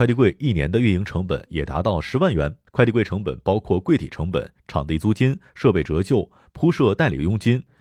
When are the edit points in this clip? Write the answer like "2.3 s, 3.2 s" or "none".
2.7 s

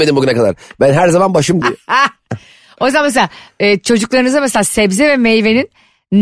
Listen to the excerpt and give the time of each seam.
1.6 s

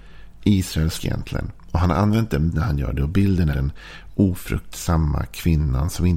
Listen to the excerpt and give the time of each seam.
1.0 s, 2.5 s, 3.5 s

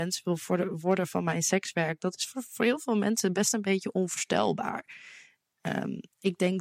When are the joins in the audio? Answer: none

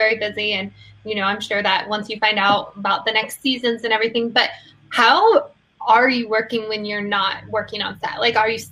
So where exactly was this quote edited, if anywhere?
none

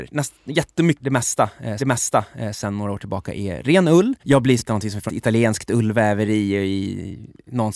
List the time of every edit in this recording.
1.0 s, 1.8 s, 4.2 s, 4.6 s, 5.1 s

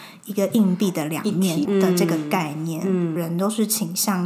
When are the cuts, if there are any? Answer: 1.6 s

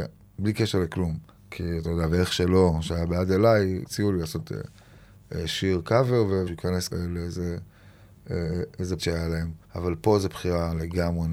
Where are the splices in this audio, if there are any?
1.3 s, 3.9 s, 6.5 s, 6.9 s, 9.0 s, 9.6 s

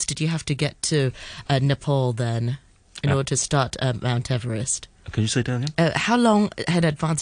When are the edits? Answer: none

